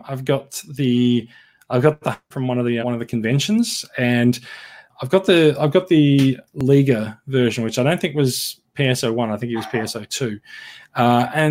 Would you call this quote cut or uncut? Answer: cut